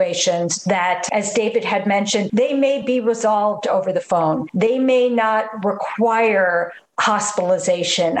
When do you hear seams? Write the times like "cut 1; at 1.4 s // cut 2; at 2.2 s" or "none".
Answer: none

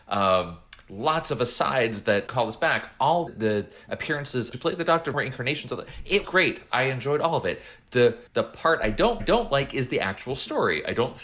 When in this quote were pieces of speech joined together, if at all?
cut 1; at 2.3 s // cut 2; at 3.3 s // cut 3; at 4.5 s // cut 4; at 5.1 s // cut 5; at 6.2 s // cut 6; at 8.3 s // cut 7; at 9.2 s

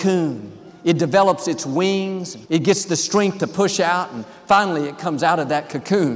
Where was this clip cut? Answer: cut 1; at 2.5 s

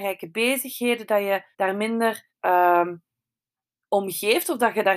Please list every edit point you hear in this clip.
cut 1; at 1.5 s // cut 2; at 2.3 s

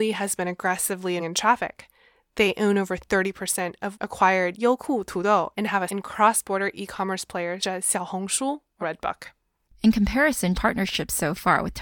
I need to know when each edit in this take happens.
cut 1; at 1.2 s // cut 2; at 3.9 s // cut 3; at 5.5 s // cut 4; at 5.9 s // cut 5; at 7.6 s // cut 6; at 8.8 s // cut 7; at 10.5 s

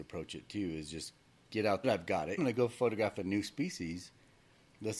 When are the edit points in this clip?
cut 1; at 1.8 s // cut 2; at 2.4 s

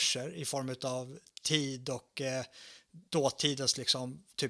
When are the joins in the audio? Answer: cut 1; at 3.1 s

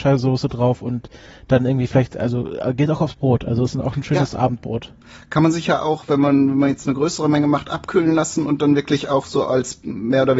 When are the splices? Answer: none

